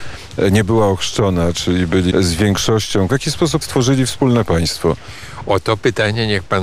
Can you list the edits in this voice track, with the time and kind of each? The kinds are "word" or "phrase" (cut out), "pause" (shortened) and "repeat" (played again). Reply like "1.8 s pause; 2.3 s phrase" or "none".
2.1 s phrase; 3.1 s phrase; 3.6 s word